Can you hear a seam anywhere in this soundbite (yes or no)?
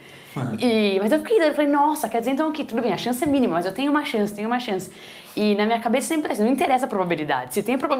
no